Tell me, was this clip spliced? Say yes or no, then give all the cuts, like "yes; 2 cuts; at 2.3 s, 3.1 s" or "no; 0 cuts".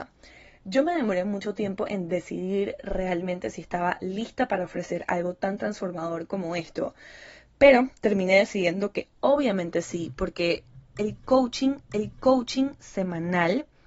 yes; 1 cut; at 11.8 s